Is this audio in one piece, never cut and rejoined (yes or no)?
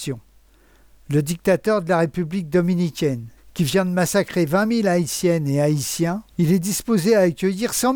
no